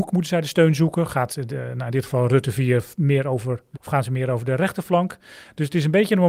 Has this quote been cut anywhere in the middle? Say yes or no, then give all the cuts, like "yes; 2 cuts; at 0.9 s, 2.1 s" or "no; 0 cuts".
yes; 1 cut; at 3.7 s